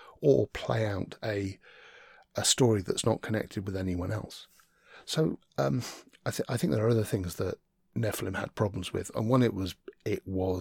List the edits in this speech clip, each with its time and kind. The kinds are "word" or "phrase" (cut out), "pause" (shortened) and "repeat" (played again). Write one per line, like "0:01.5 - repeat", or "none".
none